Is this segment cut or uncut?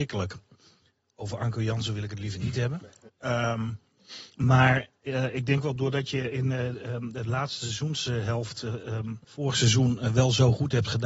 cut